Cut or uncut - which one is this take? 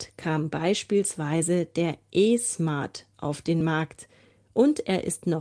uncut